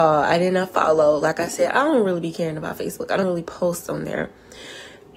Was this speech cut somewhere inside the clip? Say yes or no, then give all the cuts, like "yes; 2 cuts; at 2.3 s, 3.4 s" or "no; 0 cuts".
yes; 1 cut; at 3.2 s